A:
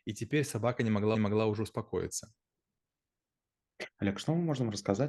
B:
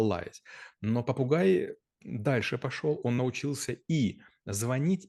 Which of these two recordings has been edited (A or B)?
A